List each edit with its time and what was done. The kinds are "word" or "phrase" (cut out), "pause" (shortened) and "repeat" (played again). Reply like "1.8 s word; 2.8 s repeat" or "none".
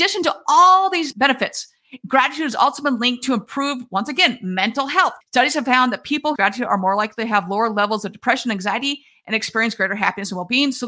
1.1 s word; 5.2 s pause; 6.4 s phrase